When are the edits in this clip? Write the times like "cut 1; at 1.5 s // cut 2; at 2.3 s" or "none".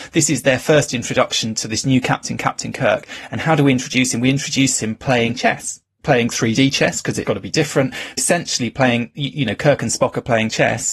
cut 1; at 7.3 s // cut 2; at 8.2 s